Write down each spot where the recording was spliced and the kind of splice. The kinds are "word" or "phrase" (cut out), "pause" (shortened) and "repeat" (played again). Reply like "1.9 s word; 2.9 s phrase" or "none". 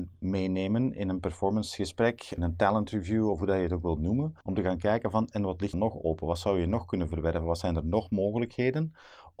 2.4 s phrase; 4.4 s pause; 5.7 s phrase